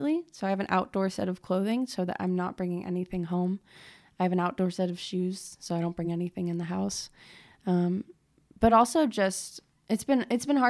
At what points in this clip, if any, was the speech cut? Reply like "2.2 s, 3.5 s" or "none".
none